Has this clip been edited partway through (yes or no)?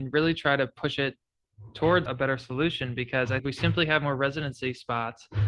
yes